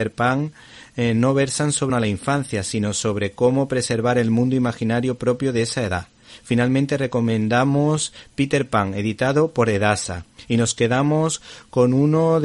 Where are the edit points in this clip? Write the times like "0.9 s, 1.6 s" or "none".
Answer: 1.9 s